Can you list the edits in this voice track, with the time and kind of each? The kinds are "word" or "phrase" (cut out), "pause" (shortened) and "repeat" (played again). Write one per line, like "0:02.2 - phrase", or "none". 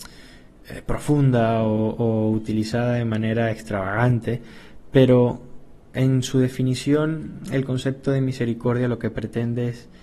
0:05.8 - pause

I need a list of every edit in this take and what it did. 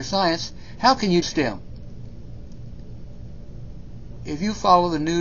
0:01.2 - word

